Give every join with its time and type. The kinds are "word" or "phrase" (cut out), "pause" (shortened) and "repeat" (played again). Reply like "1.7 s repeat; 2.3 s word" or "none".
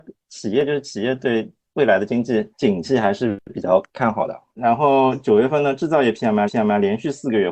2.5 s pause; 3.9 s pause; 6.5 s repeat